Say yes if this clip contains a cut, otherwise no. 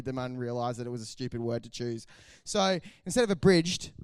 no